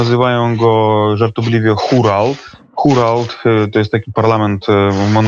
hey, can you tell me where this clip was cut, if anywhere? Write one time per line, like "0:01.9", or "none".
none

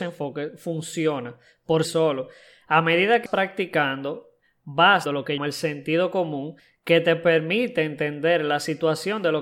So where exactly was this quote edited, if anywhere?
0:01.8
0:03.3
0:05.1
0:05.4

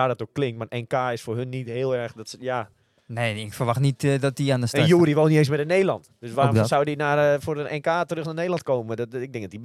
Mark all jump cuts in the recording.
none

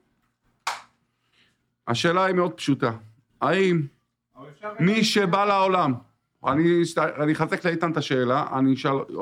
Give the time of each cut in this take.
none

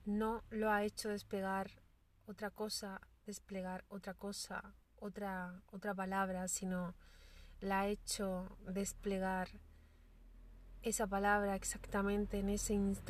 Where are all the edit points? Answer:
none

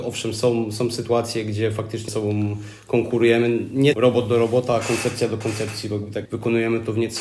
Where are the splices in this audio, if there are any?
0:02.1
0:03.9
0:06.3

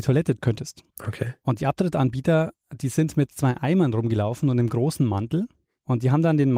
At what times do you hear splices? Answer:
0:00.9

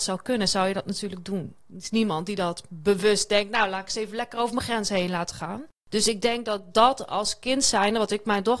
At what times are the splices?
0:01.6

